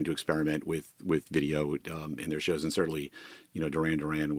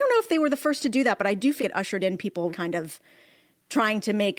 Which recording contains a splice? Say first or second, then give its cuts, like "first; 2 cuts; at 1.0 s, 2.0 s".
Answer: second; 2 cuts; at 1.6 s, 2.5 s